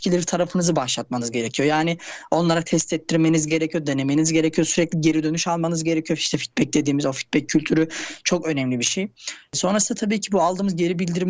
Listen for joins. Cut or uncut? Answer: uncut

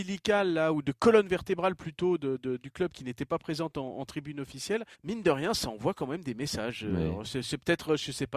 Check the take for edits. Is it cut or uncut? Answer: cut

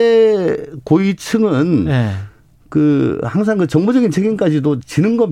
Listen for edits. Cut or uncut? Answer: uncut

